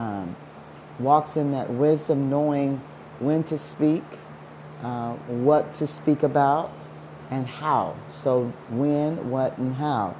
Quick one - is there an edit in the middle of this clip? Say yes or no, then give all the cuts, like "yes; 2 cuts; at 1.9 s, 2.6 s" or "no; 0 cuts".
no; 0 cuts